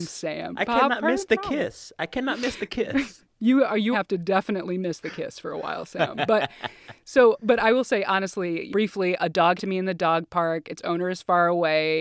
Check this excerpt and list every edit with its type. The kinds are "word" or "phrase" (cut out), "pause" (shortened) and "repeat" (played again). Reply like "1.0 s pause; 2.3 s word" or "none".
3.9 s phrase; 8.7 s word; 9.6 s phrase